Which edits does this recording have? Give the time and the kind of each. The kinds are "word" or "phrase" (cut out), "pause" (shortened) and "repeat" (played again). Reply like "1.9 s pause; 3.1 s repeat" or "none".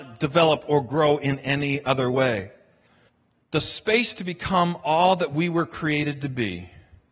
3.1 s pause